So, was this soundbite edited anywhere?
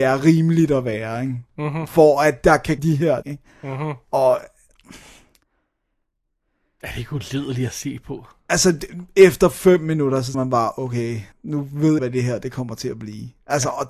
yes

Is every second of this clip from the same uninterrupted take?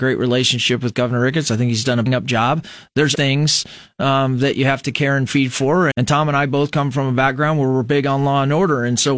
no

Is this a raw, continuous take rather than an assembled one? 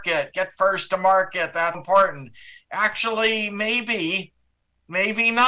no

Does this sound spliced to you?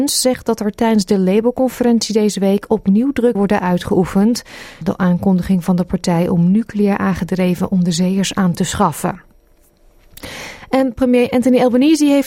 yes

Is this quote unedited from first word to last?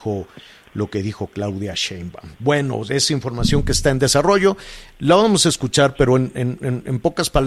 yes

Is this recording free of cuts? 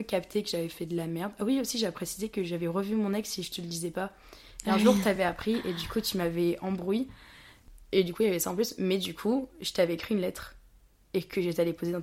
yes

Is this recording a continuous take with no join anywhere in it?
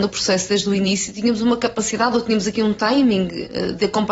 yes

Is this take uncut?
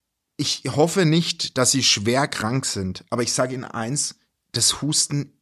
yes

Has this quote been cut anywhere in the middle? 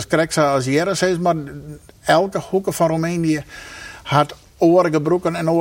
no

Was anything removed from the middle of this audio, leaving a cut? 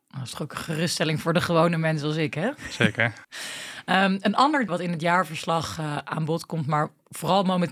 yes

